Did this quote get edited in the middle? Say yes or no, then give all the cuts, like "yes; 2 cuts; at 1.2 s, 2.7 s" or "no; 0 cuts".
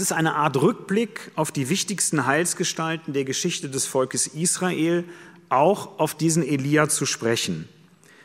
no; 0 cuts